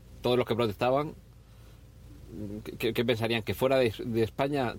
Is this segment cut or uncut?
uncut